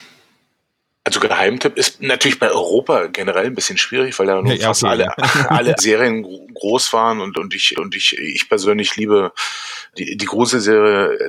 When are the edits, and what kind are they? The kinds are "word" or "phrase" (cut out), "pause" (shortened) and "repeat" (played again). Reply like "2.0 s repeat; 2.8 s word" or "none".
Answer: 5.8 s word; 7.7 s repeat; 9.9 s word